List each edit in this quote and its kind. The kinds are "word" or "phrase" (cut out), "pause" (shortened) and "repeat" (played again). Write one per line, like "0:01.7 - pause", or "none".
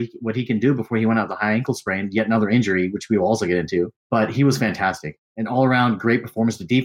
0:04.0 - pause